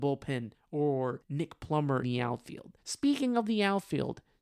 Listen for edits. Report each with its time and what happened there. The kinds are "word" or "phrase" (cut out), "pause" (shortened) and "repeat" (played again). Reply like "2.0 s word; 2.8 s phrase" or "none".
1.2 s pause; 2.0 s word